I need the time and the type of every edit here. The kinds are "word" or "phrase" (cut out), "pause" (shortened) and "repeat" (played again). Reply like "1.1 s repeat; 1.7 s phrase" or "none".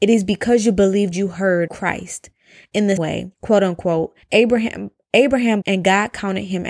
1.1 s phrase; 1.7 s word; 3.0 s word; 3.3 s pause; 4.2 s pause; 5.6 s phrase